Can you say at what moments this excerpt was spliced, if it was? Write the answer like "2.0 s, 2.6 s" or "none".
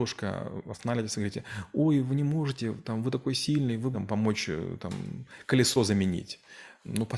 3.9 s